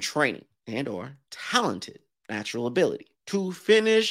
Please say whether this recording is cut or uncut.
uncut